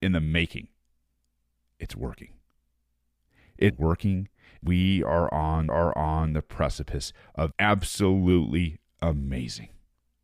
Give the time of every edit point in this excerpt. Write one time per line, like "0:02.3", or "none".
0:01.3
0:03.7
0:04.6
0:05.7
0:07.5